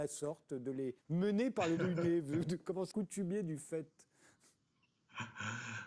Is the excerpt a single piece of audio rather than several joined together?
no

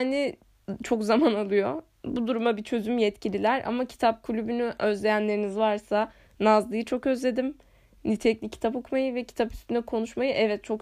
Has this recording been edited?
no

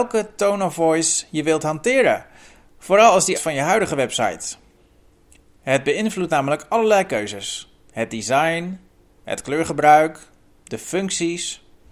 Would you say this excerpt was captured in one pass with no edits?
no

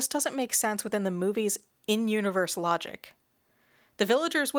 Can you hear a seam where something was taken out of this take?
no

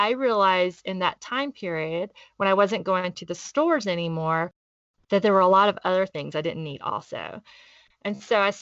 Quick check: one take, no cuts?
yes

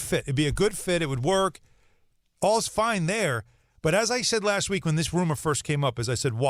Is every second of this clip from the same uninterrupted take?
yes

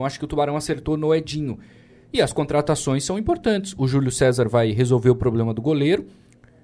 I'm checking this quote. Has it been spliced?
no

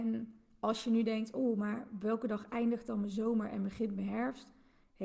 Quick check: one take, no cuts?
yes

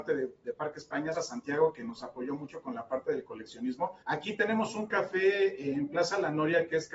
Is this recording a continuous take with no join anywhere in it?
no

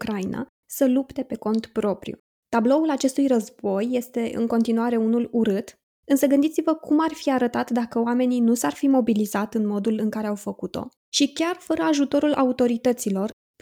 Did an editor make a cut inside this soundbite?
no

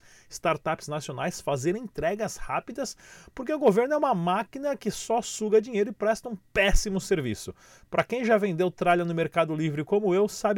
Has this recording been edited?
yes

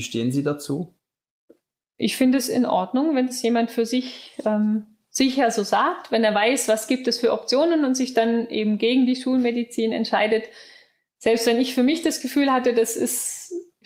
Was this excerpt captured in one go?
yes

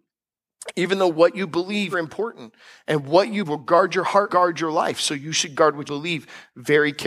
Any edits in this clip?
yes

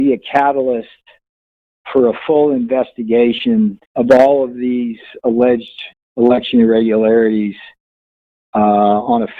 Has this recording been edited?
yes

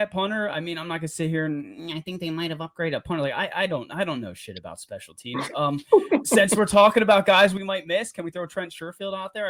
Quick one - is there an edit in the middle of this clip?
no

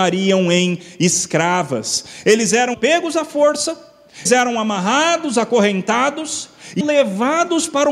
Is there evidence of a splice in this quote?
yes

